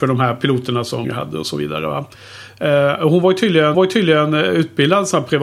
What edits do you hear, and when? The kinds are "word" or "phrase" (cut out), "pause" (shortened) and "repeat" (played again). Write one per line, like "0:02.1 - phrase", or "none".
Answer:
0:01.0 - word
0:03.7 - repeat